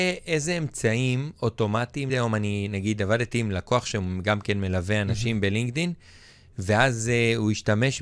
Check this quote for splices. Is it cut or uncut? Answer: cut